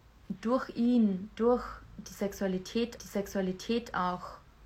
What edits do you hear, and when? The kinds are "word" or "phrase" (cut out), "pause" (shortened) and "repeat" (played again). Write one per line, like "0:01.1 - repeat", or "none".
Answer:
0:03.0 - repeat